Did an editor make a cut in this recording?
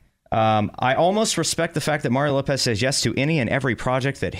no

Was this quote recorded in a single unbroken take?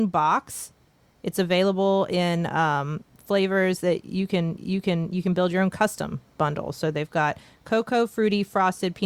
no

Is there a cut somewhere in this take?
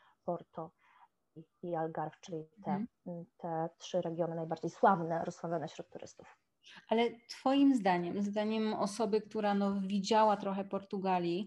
no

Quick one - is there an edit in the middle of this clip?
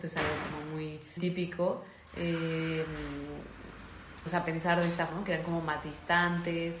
yes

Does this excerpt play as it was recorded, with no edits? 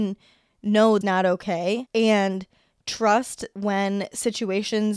no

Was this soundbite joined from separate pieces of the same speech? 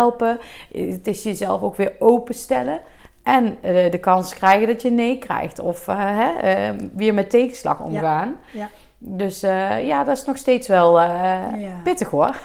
no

